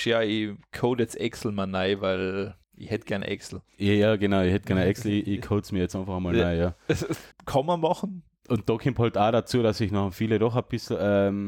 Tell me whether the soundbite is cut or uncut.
cut